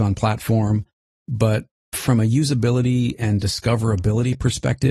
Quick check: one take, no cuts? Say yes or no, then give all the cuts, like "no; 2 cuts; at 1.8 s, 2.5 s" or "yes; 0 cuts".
yes; 0 cuts